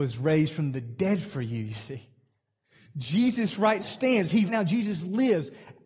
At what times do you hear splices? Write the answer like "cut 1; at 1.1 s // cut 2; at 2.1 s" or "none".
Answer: cut 1; at 3.8 s // cut 2; at 4.5 s